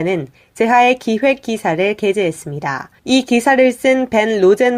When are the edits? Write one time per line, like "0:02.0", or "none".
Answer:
0:03.0